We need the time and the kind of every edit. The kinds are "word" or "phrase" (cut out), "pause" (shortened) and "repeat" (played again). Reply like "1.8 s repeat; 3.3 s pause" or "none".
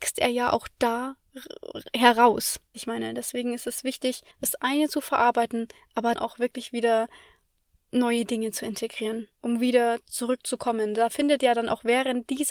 2.7 s phrase; 4.3 s pause; 6.2 s word; 9.4 s pause

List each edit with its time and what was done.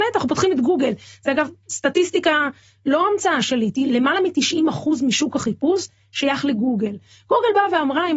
none

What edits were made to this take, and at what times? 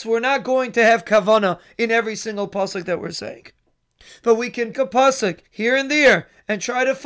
4.7 s word; 5.5 s pause

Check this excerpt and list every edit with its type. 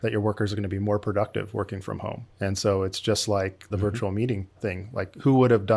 2.3 s pause; 3.7 s word; 4.6 s word

